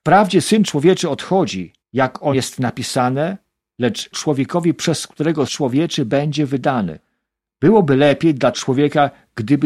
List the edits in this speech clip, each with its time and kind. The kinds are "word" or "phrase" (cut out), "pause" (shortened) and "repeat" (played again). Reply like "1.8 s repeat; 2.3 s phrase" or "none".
1.8 s pause; 2.3 s word; 4.1 s phrase; 5.5 s word; 8.5 s word